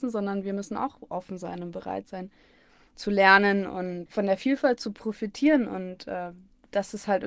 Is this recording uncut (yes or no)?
yes